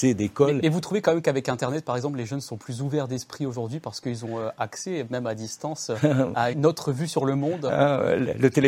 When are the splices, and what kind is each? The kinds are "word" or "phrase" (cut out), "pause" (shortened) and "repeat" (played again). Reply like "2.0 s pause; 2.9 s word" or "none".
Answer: 6.5 s word